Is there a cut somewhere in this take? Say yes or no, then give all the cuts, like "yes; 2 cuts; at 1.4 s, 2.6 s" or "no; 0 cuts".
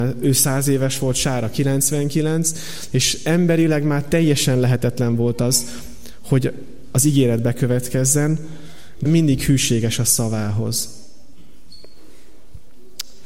yes; 1 cut; at 9.1 s